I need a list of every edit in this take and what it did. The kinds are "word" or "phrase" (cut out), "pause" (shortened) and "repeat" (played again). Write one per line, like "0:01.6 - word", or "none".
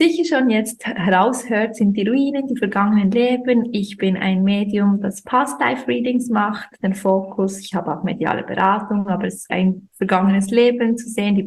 0:09.5 - phrase